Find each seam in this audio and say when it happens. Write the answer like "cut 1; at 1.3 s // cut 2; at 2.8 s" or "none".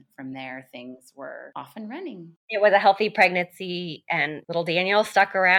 none